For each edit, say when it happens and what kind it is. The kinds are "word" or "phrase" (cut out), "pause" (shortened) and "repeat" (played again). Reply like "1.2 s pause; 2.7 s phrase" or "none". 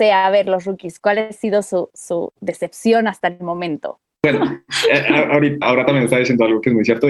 5.6 s phrase

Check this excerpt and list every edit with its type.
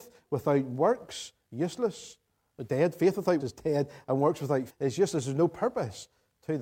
1.4 s word; 3.4 s word; 4.7 s word

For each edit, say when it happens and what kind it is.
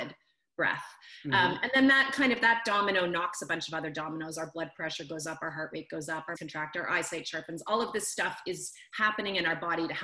6.3 s word

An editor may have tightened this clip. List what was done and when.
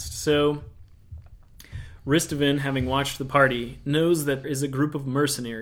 4.4 s word

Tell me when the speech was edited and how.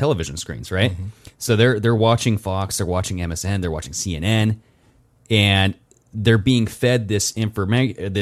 none

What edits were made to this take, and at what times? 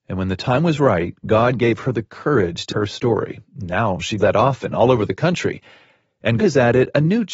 2.7 s word; 4.2 s word; 6.4 s word

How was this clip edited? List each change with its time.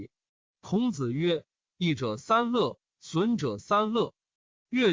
none

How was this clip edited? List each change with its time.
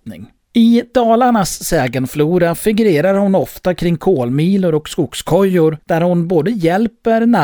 5.8 s pause

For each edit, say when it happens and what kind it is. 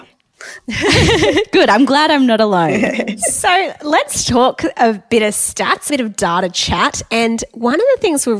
5.9 s phrase

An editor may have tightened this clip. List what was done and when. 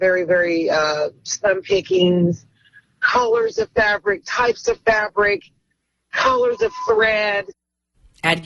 none

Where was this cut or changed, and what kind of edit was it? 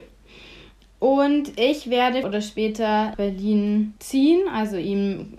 2.2 s word; 3.1 s word; 4.0 s pause

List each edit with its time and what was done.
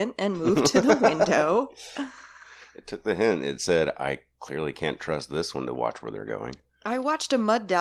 none

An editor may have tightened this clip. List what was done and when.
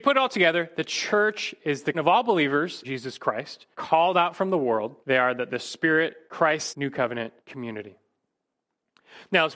1.9 s word; 2.8 s word; 3.7 s pause; 5.0 s pause; 6.3 s word; 6.7 s word; 7.4 s pause

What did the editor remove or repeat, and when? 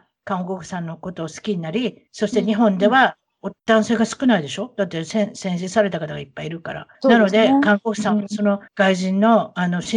2.1 s pause; 3.6 s pause; 6.9 s pause; 8.7 s pause

